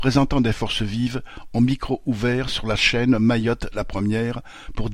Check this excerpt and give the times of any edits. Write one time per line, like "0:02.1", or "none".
none